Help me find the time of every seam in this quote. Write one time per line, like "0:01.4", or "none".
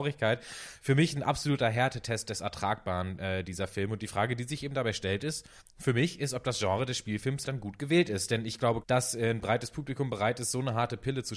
0:05.6
0:07.4
0:08.8